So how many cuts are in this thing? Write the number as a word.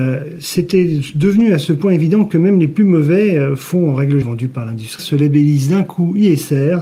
two